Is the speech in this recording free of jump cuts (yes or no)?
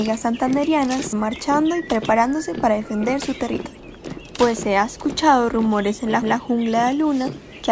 no